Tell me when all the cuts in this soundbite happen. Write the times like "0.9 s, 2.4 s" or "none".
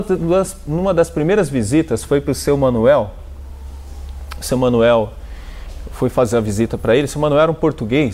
none

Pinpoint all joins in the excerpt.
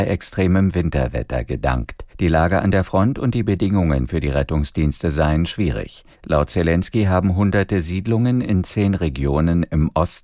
2.1 s, 6.1 s

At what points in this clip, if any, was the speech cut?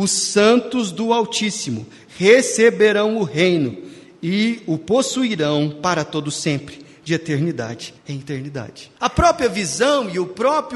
8.0 s, 9.0 s

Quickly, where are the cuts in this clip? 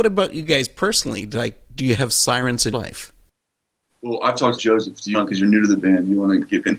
2.7 s, 4.6 s, 5.1 s

